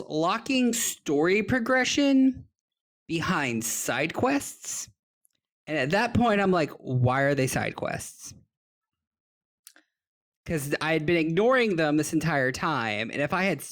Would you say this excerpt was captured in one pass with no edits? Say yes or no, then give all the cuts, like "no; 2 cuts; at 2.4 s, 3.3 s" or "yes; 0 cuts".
yes; 0 cuts